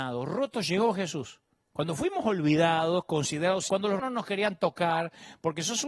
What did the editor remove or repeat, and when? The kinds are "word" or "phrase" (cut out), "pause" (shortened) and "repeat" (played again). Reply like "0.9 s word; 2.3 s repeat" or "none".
1.6 s pause; 3.7 s word; 4.0 s word